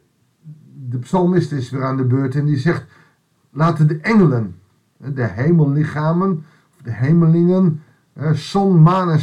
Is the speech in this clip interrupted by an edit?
no; 0 cuts

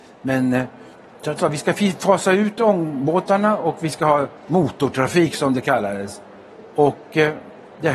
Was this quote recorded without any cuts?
no; 2 cuts; at 1.4 s, 4.4 s

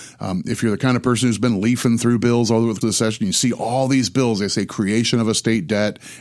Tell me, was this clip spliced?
yes; 1 cut; at 2.8 s

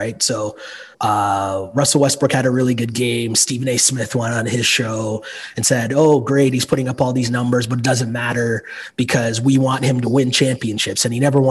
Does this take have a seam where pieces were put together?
yes; 1 cut; at 0.9 s

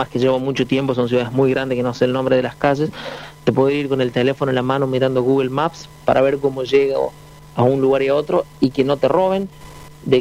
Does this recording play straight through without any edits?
yes; 0 cuts

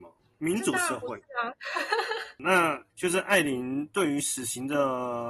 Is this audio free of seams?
no; 1 cut; at 2.9 s

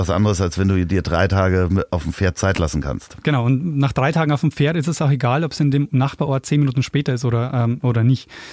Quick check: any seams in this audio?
no; 0 cuts

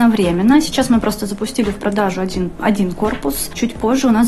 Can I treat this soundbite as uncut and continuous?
yes; 0 cuts

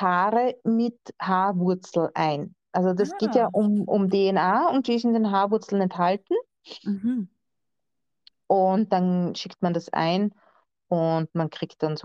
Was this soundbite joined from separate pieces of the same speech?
no; 0 cuts

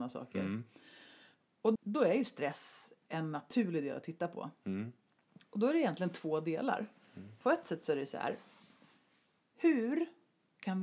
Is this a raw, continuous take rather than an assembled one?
no; 1 cut; at 1.8 s

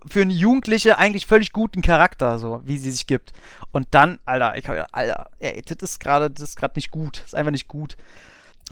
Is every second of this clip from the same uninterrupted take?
yes; 0 cuts

